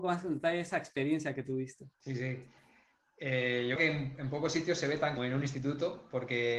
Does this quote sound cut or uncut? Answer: cut